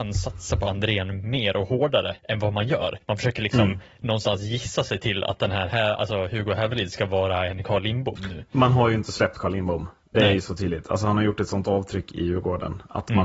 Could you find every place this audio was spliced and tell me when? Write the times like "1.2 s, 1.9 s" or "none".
2.2 s, 3.0 s